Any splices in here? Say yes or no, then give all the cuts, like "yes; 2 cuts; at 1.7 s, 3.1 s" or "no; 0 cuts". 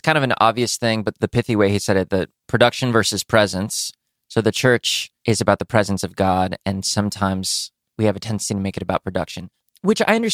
no; 0 cuts